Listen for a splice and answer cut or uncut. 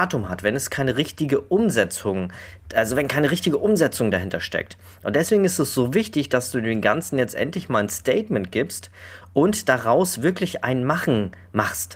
uncut